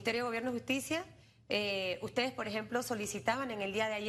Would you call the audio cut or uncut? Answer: uncut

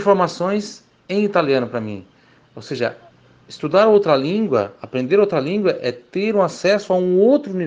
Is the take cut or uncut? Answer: uncut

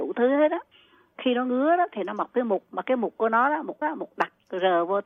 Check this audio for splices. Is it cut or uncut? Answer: cut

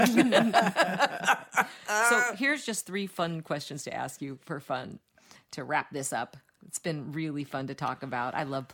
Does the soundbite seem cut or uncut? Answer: uncut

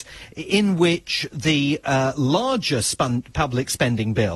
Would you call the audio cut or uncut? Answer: uncut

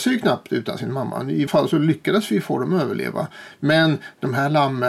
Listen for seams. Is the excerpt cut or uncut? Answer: cut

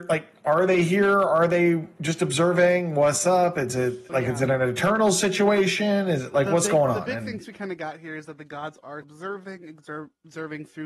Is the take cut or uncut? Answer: cut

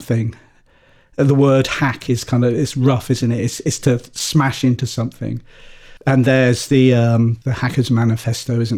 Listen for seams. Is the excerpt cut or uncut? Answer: cut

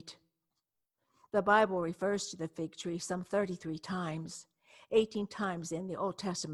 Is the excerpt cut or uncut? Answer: uncut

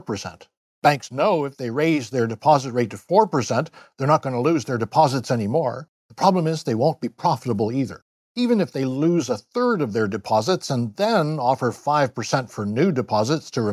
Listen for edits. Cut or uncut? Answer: uncut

